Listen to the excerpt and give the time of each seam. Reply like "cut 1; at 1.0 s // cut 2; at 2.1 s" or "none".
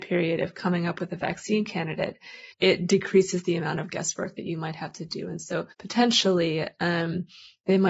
cut 1; at 2.5 s // cut 2; at 5.7 s